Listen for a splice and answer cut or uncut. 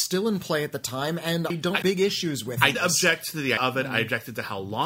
cut